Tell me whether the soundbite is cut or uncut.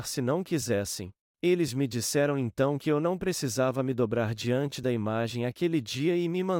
cut